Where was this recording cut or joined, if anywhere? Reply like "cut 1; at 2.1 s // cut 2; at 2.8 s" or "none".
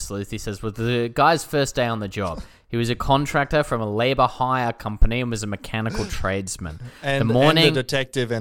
none